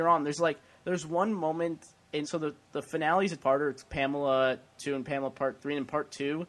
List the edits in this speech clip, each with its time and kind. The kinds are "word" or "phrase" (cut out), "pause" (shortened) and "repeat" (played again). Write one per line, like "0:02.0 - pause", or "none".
0:02.2 - word
0:03.4 - word
0:04.8 - word